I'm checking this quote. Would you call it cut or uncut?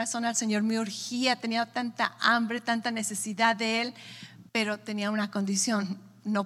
cut